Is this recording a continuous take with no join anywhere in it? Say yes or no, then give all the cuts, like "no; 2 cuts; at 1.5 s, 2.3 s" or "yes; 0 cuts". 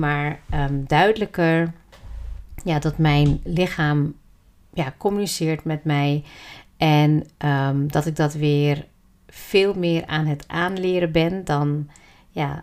yes; 0 cuts